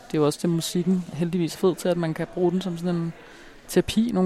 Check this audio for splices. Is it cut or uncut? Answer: cut